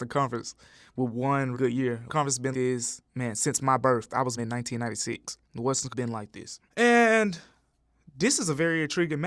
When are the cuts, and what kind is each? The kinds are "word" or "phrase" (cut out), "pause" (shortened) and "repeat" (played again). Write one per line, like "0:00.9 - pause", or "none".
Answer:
0:01.5 - word
0:02.1 - word
0:02.5 - word
0:03.1 - pause
0:04.4 - word
0:05.4 - pause
0:05.9 - phrase
0:06.7 - pause